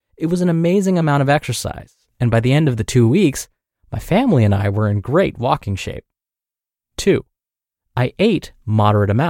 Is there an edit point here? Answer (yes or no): no